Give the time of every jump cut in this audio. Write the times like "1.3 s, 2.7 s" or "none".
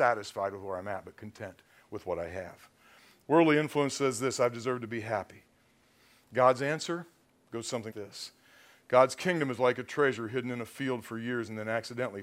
7.9 s